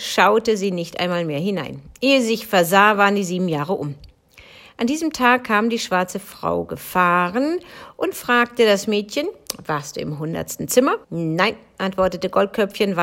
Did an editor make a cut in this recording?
yes; 1 cut; at 11.0 s

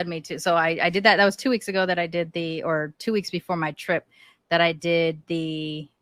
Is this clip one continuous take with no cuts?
yes; 0 cuts

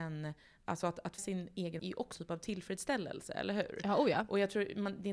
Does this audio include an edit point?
yes; 3 cuts; at 1.2 s, 1.8 s, 2.1 s

